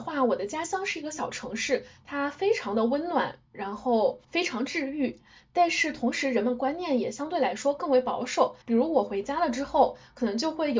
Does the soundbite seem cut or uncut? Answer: cut